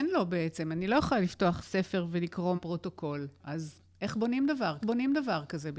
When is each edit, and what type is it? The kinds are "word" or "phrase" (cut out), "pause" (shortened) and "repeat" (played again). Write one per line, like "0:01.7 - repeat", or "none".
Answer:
0:01.6 - word
0:02.6 - word
0:04.8 - repeat